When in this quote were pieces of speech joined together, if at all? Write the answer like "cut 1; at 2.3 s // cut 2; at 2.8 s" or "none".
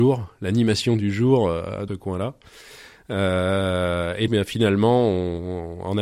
cut 1; at 1.9 s // cut 2; at 4.3 s